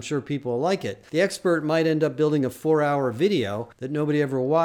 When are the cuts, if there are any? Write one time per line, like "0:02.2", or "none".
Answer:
0:03.7